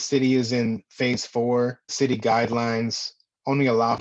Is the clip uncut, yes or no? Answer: no